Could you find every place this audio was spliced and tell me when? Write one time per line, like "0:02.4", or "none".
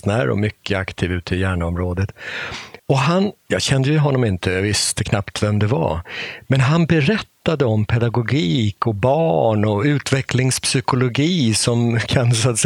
0:02.8